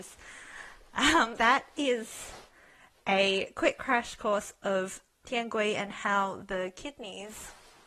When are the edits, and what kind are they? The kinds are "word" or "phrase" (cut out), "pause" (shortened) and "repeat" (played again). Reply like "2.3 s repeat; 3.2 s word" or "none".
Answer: 1.4 s word